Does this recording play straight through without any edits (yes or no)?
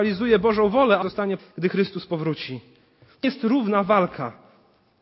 no